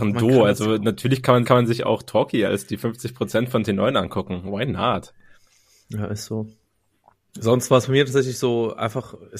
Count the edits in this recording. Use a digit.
1